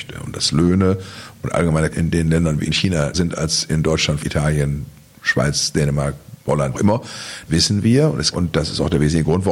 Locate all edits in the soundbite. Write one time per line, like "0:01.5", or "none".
0:01.9
0:02.7
0:03.1
0:04.2
0:06.7
0:07.5
0:08.3